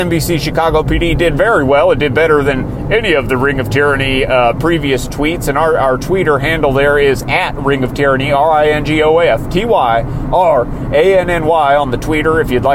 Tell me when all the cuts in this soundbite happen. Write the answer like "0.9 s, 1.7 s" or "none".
none